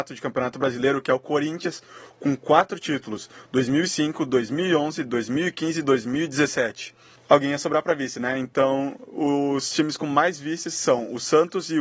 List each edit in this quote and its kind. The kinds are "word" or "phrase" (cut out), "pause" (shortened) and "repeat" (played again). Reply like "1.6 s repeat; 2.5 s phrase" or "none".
none